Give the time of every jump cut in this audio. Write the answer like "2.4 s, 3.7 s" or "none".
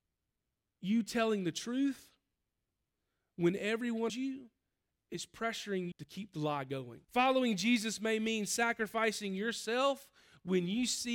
4.1 s, 5.9 s, 7.0 s

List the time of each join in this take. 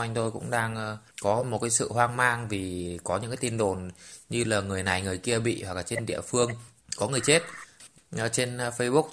none

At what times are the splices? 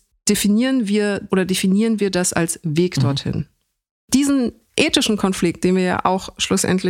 1.3 s

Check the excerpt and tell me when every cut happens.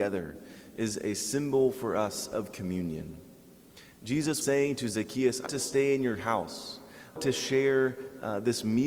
4.4 s, 5.5 s, 7.2 s

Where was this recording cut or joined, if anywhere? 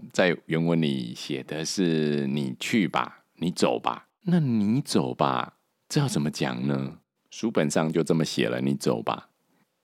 4.2 s, 5.7 s, 7.1 s

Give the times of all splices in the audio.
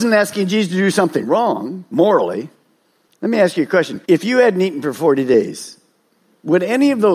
4.0 s

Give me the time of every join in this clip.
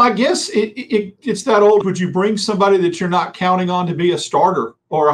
1.8 s

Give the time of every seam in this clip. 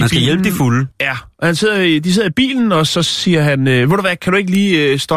0.9 s

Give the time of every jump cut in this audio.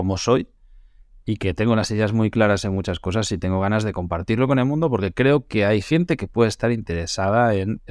none

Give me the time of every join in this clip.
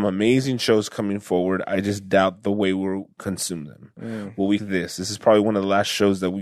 4.6 s

